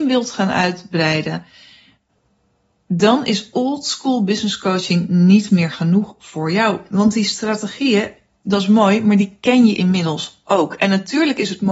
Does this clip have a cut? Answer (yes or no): no